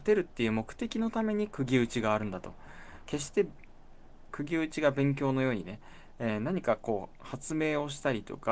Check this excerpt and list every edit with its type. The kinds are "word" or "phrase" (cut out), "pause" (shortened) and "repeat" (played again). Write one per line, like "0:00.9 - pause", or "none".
0:04.3 - phrase